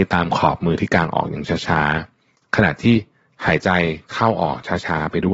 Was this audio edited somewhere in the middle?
no; 0 cuts

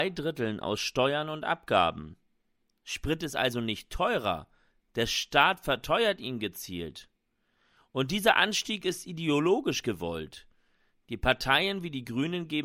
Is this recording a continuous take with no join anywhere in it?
yes; 0 cuts

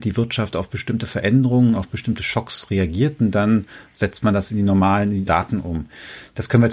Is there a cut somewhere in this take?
yes; 1 cut; at 5.3 s

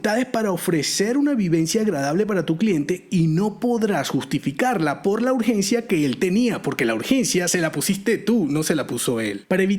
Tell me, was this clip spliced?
no; 0 cuts

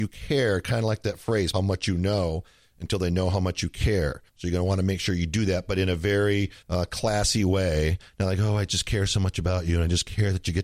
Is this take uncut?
no; 3 cuts; at 1.5 s, 4.3 s, 6.6 s

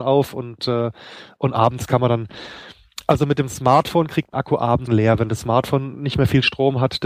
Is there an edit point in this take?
yes; 2 cuts; at 4.3 s, 4.9 s

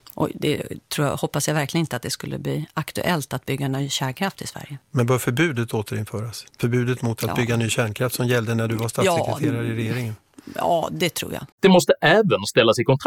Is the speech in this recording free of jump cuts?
no; 2 cuts; at 4.8 s, 11.5 s

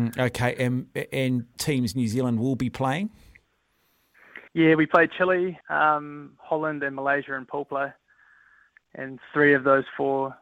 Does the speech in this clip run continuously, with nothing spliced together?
no; 3 cuts; at 1.5 s, 4.5 s, 5.6 s

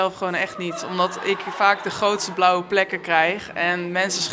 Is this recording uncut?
yes; 0 cuts

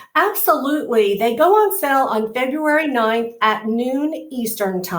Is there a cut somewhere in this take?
no; 0 cuts

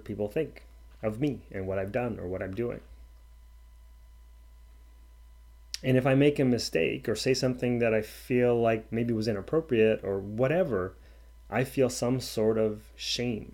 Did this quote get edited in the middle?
no; 0 cuts

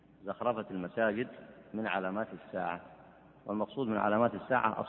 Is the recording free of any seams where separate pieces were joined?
yes; 0 cuts

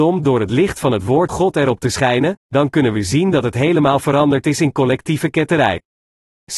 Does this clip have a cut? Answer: yes; 1 cut; at 1.3 s

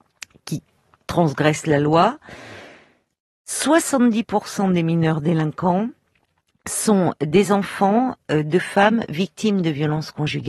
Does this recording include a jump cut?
no; 0 cuts

